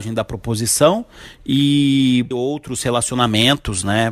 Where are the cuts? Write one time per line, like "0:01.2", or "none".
0:02.3